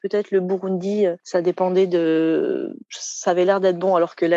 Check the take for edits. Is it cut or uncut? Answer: cut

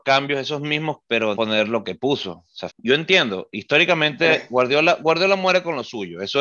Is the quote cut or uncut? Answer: cut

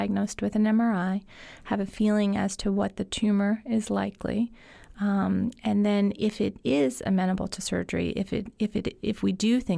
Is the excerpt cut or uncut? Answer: uncut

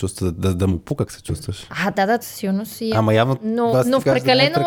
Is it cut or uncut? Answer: cut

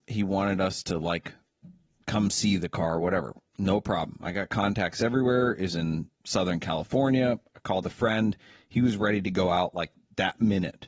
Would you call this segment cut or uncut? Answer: uncut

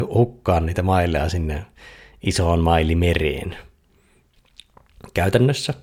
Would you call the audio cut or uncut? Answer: uncut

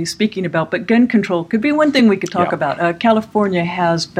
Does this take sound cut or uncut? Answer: uncut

